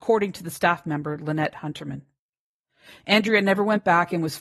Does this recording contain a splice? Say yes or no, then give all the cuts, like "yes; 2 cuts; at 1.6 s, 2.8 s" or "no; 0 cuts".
no; 0 cuts